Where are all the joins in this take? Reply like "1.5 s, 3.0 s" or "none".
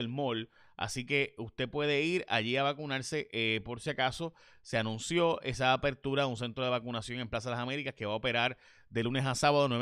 none